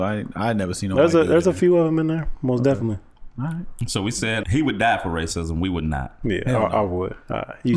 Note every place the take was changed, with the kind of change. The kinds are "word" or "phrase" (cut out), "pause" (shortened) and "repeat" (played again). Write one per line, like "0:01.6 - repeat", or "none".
0:04.4 - word